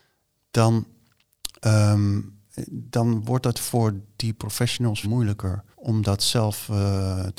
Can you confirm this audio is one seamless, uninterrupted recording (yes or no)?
no